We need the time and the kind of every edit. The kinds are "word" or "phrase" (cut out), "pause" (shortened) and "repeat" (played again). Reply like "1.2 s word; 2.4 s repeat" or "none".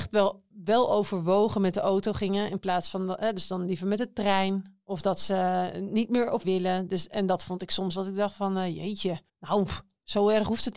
6.4 s word; 8.0 s word; 9.3 s pause